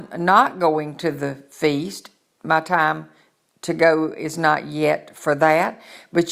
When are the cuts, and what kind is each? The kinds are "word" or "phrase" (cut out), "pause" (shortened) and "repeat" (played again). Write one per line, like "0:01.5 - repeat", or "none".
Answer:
none